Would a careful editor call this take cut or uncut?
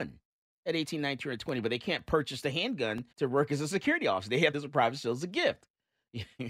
cut